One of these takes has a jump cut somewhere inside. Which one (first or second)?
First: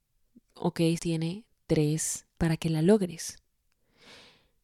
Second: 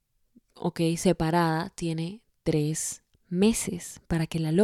first